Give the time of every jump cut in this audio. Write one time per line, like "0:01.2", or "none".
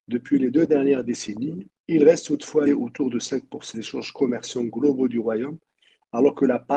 0:01.8
0:02.7
0:03.7